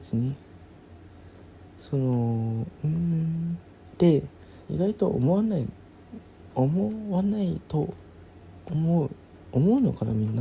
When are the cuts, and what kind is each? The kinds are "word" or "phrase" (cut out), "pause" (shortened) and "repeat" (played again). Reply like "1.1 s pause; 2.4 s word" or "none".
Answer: 4.6 s pause